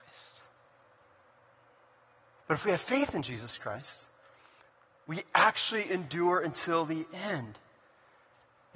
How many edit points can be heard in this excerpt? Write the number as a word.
zero